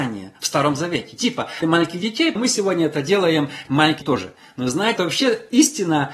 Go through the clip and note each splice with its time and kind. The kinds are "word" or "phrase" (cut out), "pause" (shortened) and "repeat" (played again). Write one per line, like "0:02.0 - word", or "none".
0:01.6 - word
0:02.4 - word
0:03.7 - word
0:04.0 - word
0:05.0 - word